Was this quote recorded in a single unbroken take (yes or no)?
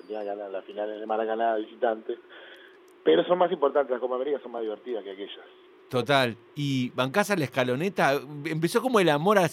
yes